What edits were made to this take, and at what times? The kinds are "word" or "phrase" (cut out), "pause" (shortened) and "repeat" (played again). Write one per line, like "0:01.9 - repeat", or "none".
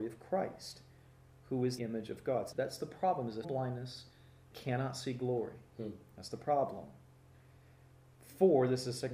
0:01.8 - word
0:02.5 - word
0:03.4 - word
0:04.5 - word